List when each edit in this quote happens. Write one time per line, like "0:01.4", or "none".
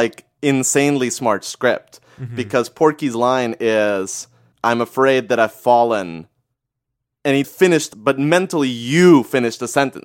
0:07.4
0:07.9